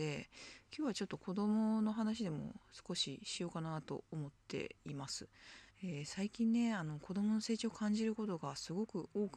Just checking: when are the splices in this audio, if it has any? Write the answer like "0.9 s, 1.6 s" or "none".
5.7 s